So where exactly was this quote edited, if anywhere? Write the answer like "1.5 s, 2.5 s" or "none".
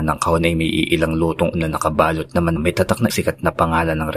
1.5 s, 2.6 s, 3.1 s